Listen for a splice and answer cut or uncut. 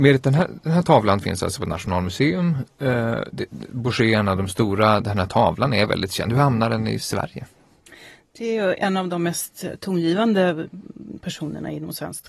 uncut